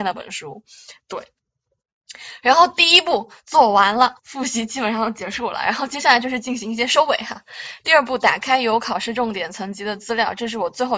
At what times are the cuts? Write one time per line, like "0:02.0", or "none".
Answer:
0:04.2